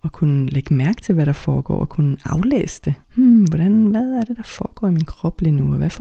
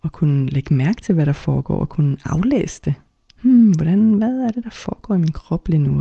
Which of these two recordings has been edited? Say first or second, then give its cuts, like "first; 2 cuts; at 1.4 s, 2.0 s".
first; 1 cut; at 3.0 s